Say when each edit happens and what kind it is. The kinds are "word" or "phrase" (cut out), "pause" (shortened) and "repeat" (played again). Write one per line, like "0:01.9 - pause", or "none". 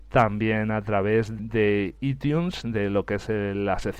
0:01.4 - word

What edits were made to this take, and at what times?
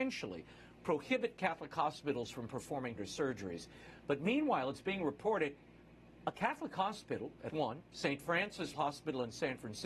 0:03.0 - word
0:07.5 - word
0:08.7 - word

